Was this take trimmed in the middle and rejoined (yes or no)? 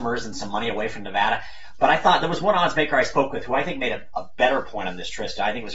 no